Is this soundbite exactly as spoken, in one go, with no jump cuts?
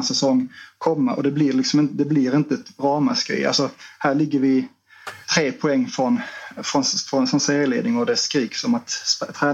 no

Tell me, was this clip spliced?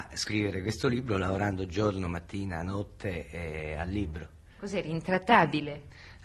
no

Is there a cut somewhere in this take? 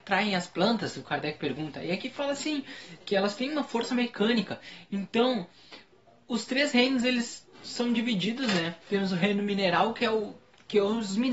yes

